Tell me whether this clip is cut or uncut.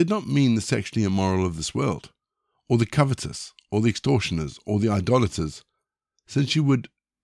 uncut